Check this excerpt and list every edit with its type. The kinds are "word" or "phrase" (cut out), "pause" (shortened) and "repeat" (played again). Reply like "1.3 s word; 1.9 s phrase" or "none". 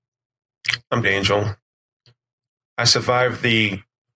1.0 s word